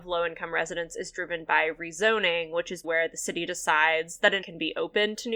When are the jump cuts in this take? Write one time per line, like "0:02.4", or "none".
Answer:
0:02.8
0:04.4